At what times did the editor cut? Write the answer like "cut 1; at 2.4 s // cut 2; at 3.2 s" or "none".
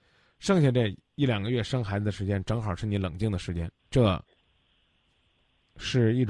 cut 1; at 3.8 s